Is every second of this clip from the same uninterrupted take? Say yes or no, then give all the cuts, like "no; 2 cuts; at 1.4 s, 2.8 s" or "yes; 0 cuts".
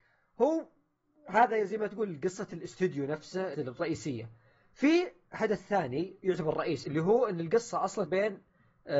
no; 3 cuts; at 3.5 s, 6.8 s, 8.1 s